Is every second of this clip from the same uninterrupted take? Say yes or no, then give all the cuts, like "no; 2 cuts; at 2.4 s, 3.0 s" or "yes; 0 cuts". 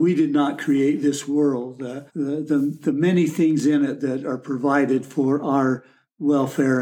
no; 1 cut; at 2.1 s